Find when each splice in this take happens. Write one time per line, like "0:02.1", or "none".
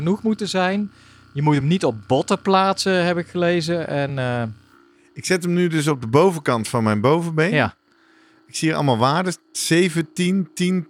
none